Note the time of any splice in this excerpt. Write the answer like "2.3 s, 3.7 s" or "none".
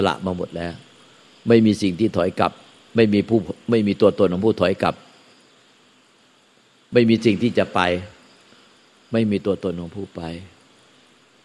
none